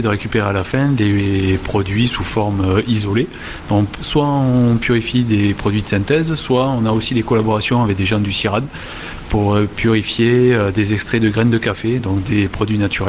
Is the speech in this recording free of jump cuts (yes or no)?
yes